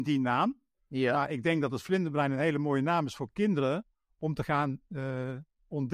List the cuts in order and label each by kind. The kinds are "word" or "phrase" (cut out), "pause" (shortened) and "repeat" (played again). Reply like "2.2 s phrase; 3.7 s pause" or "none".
none